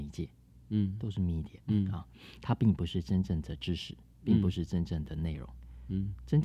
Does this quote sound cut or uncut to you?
cut